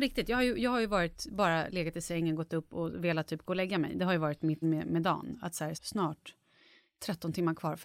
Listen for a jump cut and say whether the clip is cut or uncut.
cut